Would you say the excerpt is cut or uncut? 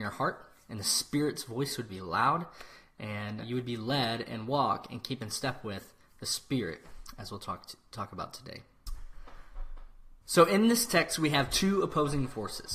cut